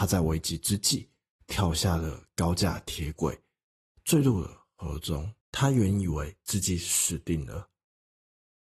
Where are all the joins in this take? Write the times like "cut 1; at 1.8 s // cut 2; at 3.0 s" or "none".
cut 1; at 5.4 s